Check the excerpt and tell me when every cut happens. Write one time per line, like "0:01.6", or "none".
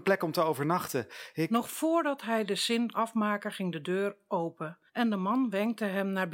0:02.9
0:04.9